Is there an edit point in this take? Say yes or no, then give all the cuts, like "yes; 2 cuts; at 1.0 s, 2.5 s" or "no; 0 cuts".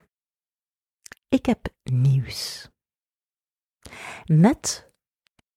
no; 0 cuts